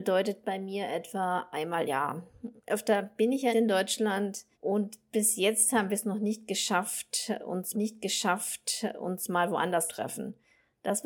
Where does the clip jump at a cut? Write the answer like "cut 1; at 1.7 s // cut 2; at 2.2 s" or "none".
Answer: cut 1; at 1.9 s // cut 2; at 2.6 s // cut 3; at 3.5 s // cut 4; at 4.5 s // cut 5; at 7.7 s // cut 6; at 9.9 s

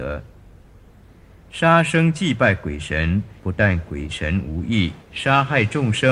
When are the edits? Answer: cut 1; at 3.4 s // cut 2; at 5.0 s

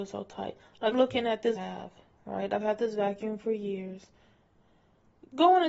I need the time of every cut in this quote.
cut 1; at 0.9 s // cut 2; at 1.6 s

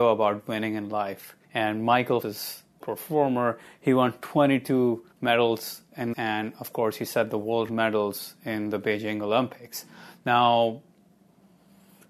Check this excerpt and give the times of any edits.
cut 1; at 1.4 s // cut 2; at 2.2 s // cut 3; at 2.8 s // cut 4; at 5.1 s // cut 5; at 6.1 s // cut 6; at 7.7 s

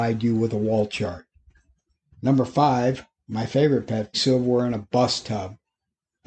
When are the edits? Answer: cut 1; at 4.1 s

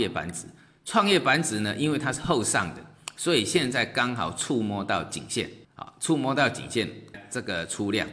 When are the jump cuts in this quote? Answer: cut 1; at 5.6 s // cut 2; at 7.1 s

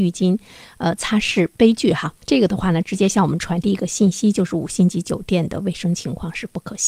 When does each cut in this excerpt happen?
cut 1; at 2.2 s

